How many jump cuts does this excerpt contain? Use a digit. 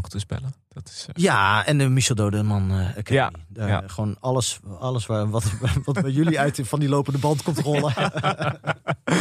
0